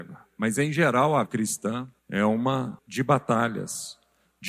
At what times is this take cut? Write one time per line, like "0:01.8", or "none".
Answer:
0:01.3
0:02.0
0:02.8